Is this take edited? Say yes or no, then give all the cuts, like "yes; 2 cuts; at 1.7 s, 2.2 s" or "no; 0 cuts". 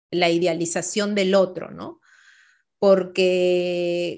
no; 0 cuts